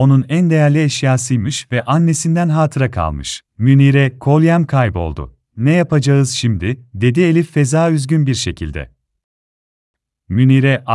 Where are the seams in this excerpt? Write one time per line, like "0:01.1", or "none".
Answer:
0:03.5
0:05.5